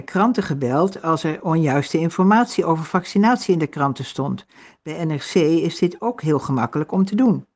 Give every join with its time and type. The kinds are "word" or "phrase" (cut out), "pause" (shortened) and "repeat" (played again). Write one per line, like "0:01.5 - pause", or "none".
none